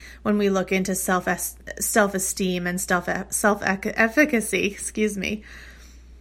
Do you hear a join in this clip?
no; 0 cuts

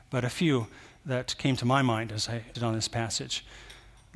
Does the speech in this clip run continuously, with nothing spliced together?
no; 1 cut; at 2.5 s

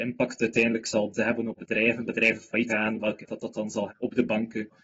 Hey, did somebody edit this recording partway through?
yes; 6 cuts; at 1.1 s, 1.6 s, 2.0 s, 2.7 s, 3.3 s, 3.9 s

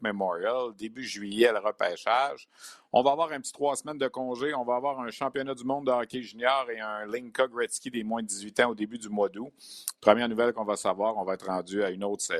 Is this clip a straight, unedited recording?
yes; 0 cuts

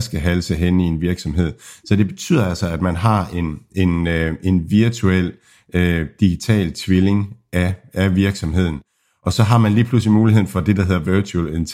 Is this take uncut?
yes; 0 cuts

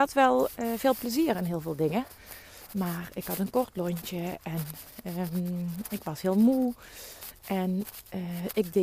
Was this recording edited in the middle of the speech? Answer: no; 0 cuts

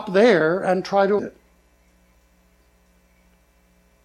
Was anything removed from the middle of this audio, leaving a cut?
yes; 1 cut; at 1.2 s

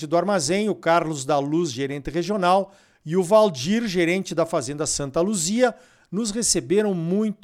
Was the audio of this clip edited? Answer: no; 0 cuts

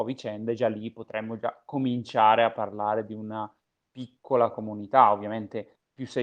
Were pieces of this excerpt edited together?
no; 0 cuts

